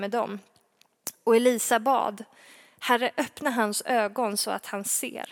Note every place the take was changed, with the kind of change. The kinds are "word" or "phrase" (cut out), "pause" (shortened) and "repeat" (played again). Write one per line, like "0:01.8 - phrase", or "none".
none